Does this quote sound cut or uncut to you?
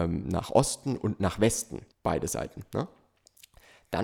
cut